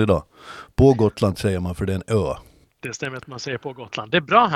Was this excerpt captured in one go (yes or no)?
no